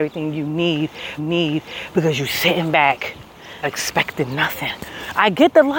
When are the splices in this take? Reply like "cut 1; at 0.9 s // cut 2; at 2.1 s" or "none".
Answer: cut 1; at 1.2 s // cut 2; at 3.6 s